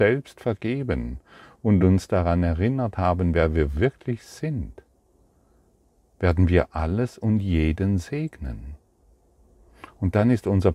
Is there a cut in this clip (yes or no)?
no